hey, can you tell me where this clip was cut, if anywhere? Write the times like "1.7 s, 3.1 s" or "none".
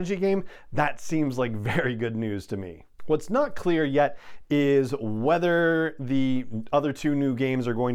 none